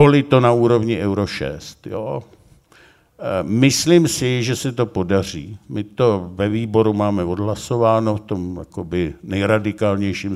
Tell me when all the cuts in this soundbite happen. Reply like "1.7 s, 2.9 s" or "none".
none